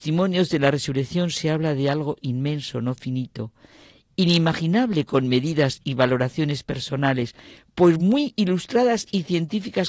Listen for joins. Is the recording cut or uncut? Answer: uncut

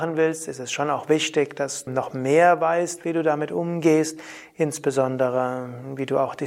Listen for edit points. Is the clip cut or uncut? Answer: cut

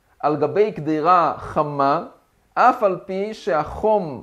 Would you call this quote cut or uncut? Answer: cut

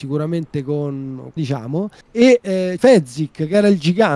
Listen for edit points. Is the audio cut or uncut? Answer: cut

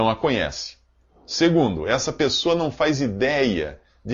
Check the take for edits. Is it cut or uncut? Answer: uncut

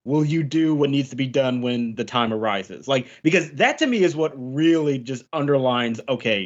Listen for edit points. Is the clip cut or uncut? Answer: uncut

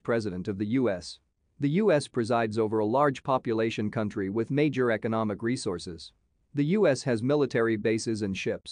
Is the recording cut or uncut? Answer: uncut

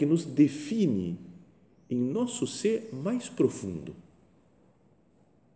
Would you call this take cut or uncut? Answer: uncut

